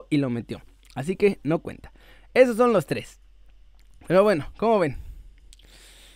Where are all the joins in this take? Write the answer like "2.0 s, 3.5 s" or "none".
none